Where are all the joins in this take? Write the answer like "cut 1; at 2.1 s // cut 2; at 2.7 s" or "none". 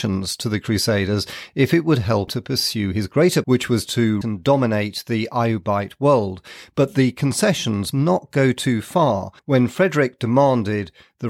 cut 1; at 2.3 s // cut 2; at 3.4 s // cut 3; at 4.2 s // cut 4; at 7.9 s // cut 5; at 9.4 s